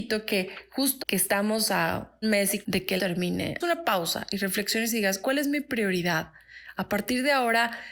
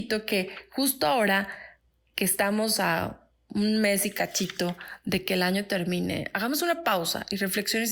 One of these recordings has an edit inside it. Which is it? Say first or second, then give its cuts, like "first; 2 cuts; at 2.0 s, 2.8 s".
first; 6 cuts; at 1.0 s, 2.2 s, 2.6 s, 3.0 s, 3.6 s, 5.2 s